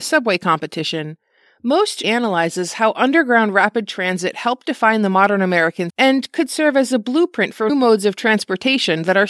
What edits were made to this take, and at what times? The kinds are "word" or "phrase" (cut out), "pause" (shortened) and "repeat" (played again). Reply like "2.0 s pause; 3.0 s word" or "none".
2.0 s word; 5.9 s word; 7.7 s word